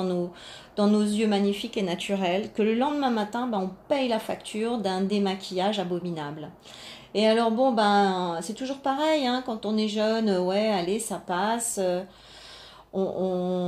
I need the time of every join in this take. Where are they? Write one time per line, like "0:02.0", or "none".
none